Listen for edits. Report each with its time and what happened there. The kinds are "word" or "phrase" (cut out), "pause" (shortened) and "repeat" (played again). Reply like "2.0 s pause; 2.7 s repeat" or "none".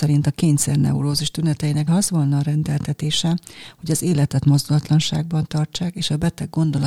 1.9 s word